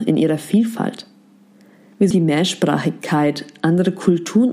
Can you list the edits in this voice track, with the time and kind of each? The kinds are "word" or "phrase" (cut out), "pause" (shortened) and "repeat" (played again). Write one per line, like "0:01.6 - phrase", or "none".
0:02.1 - word